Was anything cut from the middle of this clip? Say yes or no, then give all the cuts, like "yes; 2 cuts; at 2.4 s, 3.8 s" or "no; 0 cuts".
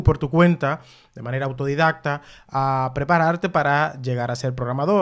no; 0 cuts